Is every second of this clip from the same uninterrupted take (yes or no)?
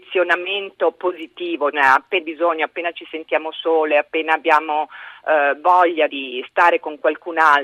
no